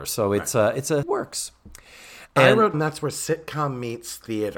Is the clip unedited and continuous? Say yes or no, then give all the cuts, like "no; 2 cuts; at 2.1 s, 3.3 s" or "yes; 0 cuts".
no; 3 cuts; at 1.0 s, 2.3 s, 2.7 s